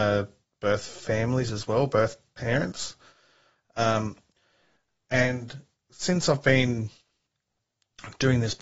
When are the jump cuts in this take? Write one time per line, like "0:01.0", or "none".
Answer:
none